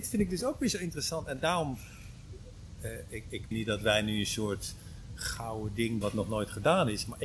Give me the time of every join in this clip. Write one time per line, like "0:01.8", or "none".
0:03.5
0:06.0